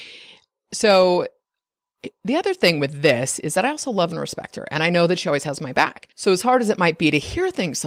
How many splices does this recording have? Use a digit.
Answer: 1